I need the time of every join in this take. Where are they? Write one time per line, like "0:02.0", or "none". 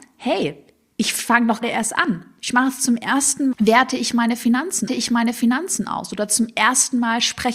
0:01.6
0:03.5
0:04.9